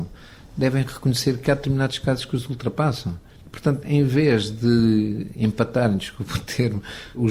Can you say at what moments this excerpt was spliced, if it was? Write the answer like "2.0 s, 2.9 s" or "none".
3.4 s